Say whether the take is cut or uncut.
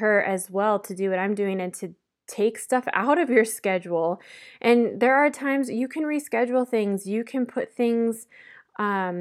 uncut